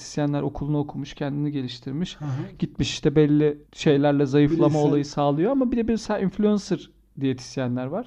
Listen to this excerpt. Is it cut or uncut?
cut